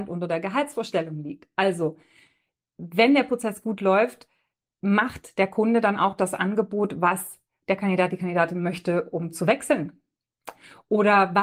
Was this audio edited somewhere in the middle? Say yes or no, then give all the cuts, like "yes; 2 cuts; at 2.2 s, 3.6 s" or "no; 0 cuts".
no; 0 cuts